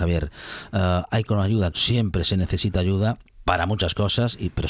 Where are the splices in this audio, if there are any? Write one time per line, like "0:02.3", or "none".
0:01.3
0:01.7